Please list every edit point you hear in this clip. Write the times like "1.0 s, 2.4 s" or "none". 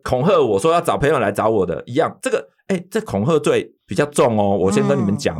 3.8 s